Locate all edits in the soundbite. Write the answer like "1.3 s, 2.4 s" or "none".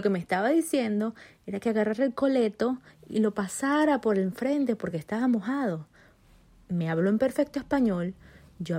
none